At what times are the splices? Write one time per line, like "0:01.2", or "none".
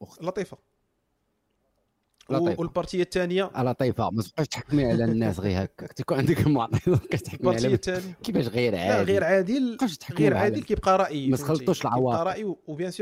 none